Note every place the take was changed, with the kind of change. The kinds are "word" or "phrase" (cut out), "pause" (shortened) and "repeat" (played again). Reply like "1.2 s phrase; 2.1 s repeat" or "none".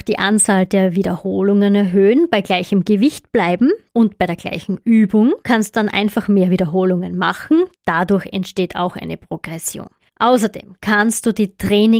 3.9 s pause; 5.4 s pause; 7.7 s pause; 10.0 s pause